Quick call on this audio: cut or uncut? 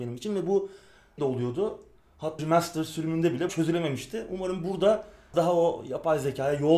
cut